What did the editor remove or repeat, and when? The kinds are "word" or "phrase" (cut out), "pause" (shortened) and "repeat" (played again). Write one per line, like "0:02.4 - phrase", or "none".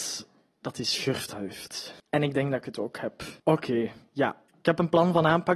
0:02.0 - pause
0:03.4 - pause
0:04.5 - pause